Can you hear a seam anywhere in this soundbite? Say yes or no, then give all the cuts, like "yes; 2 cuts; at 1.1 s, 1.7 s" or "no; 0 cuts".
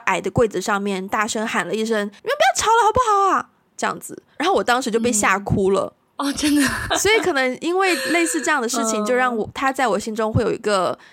yes; 2 cuts; at 2.2 s, 6.9 s